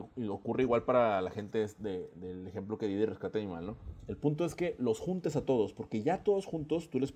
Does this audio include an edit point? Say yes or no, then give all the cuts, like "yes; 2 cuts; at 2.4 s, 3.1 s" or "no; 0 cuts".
no; 0 cuts